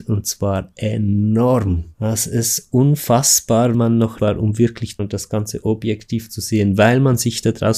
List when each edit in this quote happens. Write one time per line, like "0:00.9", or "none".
0:01.9
0:03.7
0:04.2
0:05.0

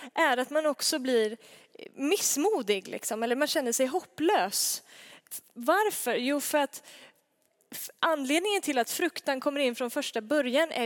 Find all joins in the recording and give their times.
none

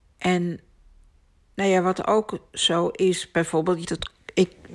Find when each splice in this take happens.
0:03.8

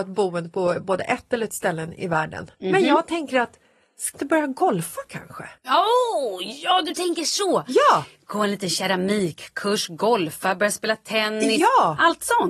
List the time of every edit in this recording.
0:01.5
0:02.5
0:04.1
0:05.6

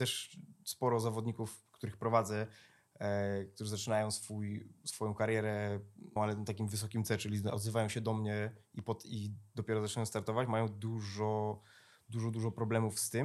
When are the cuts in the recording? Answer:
0:06.2

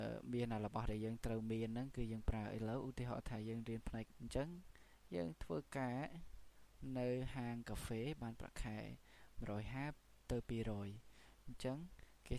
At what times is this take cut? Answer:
0:04.1

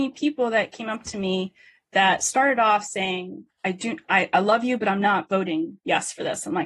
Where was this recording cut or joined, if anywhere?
none

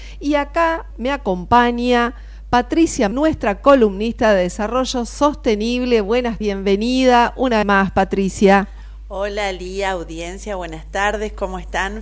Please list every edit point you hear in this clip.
0:00.9
0:03.1
0:06.4
0:07.6

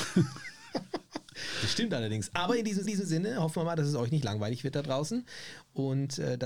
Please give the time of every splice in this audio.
0:02.8

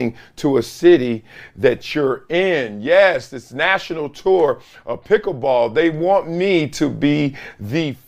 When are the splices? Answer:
none

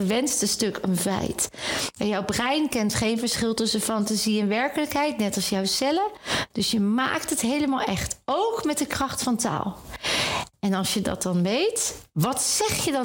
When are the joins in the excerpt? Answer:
none

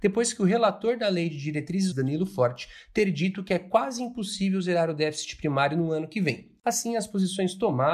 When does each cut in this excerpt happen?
0:01.9

